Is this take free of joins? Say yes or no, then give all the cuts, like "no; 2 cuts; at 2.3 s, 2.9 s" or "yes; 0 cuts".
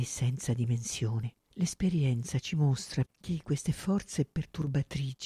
no; 2 cuts; at 1.4 s, 3.0 s